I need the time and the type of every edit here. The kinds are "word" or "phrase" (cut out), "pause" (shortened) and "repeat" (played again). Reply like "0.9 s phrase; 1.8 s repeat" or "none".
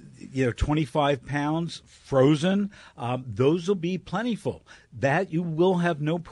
none